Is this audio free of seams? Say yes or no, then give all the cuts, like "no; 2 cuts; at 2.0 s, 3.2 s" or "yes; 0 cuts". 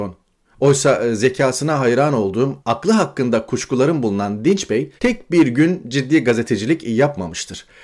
no; 2 cuts; at 2.6 s, 5.0 s